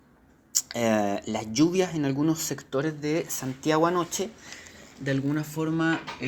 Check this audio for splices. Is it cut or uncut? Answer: uncut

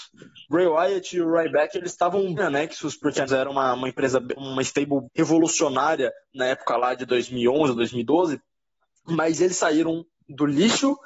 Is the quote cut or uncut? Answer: cut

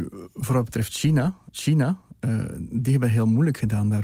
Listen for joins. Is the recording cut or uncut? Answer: cut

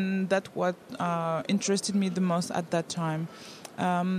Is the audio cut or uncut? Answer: uncut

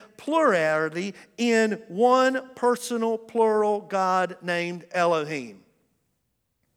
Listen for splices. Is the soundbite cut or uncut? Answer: uncut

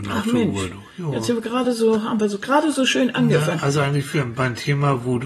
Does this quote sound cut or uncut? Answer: uncut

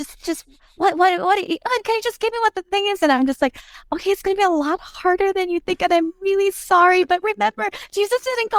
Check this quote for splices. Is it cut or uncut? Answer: uncut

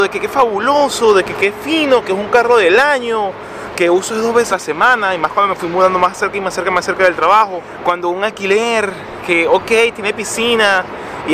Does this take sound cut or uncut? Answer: cut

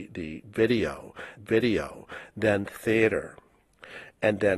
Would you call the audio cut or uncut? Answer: cut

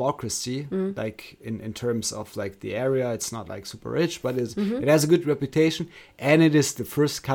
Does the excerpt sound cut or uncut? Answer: uncut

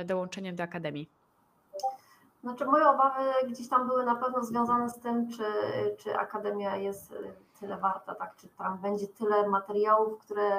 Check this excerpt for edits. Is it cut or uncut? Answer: uncut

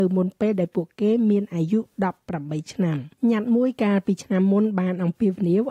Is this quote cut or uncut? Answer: cut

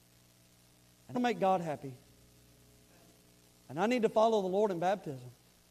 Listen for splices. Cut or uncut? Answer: cut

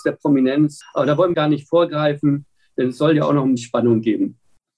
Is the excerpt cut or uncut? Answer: cut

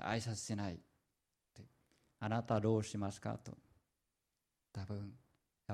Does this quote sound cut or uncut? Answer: uncut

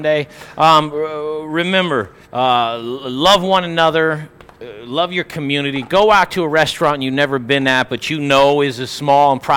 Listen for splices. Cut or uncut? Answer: cut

